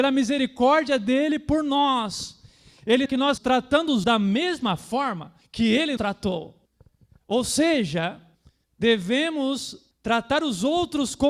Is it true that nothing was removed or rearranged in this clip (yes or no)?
no